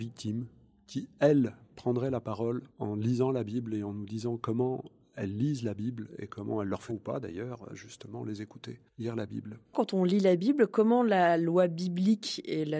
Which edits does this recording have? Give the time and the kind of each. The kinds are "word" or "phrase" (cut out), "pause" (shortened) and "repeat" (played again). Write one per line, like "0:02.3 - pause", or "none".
0:02.7 - pause
0:06.9 - phrase
0:07.7 - word
0:08.9 - pause

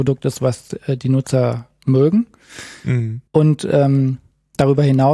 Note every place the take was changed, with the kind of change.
0:03.3 - pause

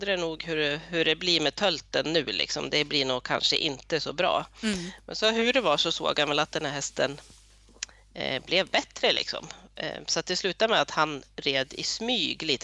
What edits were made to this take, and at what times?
none

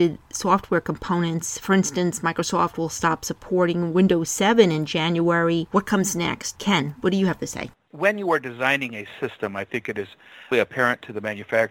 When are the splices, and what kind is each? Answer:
0:10.5 - word

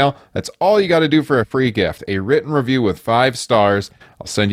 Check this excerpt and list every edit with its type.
none

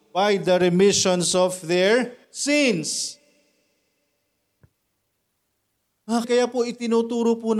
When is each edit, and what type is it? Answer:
0:02.2 - pause
0:06.2 - word

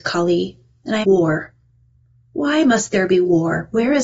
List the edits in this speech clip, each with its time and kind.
0:01.0 - phrase

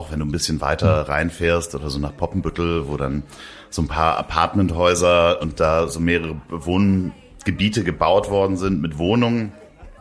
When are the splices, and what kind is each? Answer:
0:05.4 - word

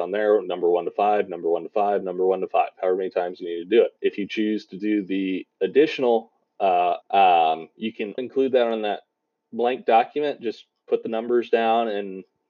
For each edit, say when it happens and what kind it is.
0:04.0 - pause
0:07.0 - word
0:08.2 - word

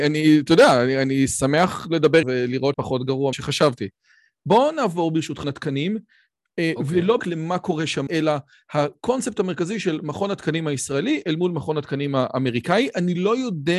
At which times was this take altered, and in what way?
0:02.2 - word
0:02.7 - word
0:03.3 - word
0:05.4 - word
0:07.2 - word
0:08.1 - word

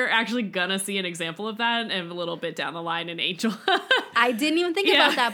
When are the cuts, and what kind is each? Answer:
none

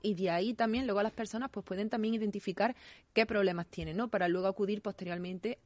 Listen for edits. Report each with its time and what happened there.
none

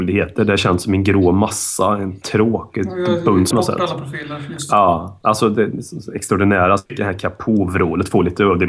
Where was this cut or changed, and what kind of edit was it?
0:02.2 - word
0:03.5 - word
0:06.9 - pause

